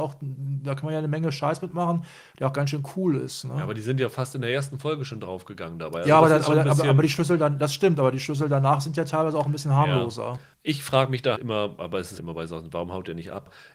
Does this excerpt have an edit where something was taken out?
yes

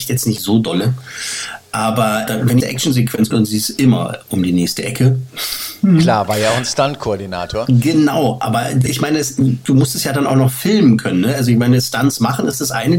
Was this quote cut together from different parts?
yes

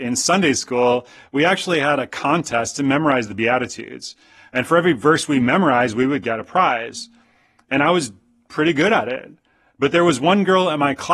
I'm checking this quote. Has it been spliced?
no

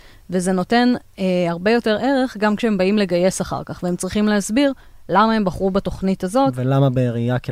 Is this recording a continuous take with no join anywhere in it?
yes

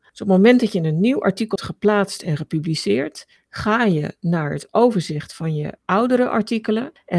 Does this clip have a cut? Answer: yes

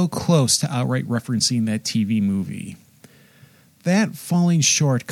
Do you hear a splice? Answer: no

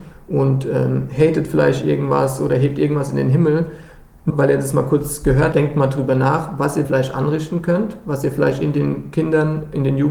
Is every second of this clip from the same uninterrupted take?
no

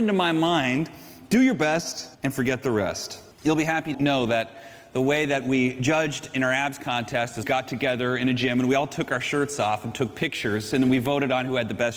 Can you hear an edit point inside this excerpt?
yes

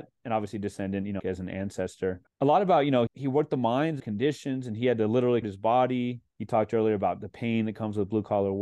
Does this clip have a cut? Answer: yes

